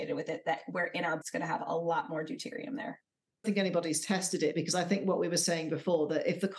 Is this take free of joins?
no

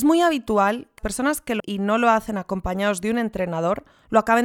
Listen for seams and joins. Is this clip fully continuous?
no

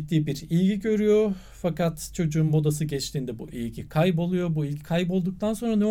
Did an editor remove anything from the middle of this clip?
no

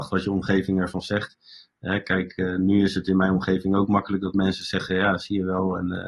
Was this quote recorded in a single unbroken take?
yes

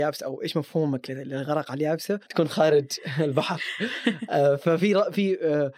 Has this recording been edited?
yes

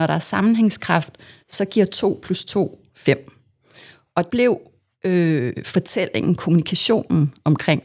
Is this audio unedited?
no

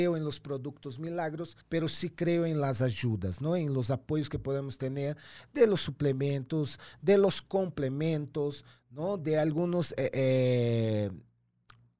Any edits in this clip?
yes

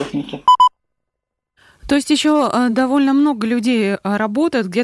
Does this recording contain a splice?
no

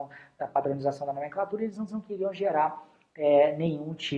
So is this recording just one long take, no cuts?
no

